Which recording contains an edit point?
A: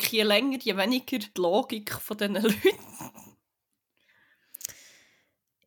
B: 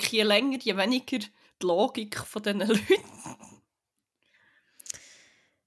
A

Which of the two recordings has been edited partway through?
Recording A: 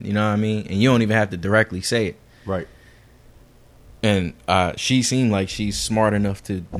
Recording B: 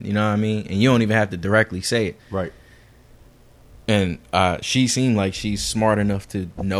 B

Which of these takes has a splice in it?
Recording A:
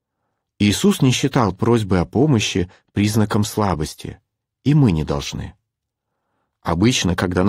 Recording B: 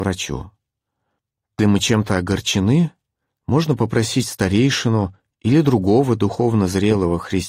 B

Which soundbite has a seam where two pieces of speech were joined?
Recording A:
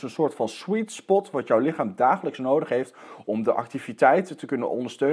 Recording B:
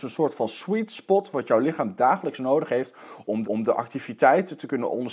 B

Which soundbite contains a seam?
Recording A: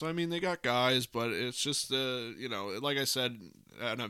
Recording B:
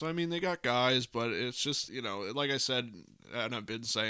B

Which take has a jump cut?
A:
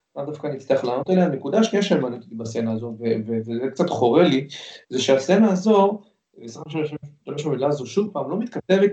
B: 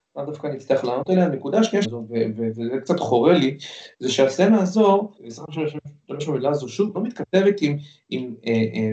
B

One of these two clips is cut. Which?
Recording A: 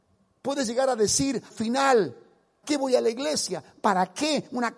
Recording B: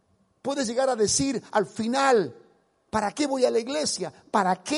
A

